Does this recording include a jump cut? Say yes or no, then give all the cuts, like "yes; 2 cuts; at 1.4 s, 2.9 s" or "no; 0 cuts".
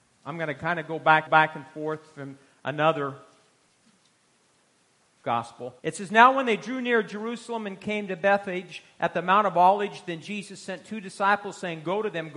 yes; 2 cuts; at 1.3 s, 5.8 s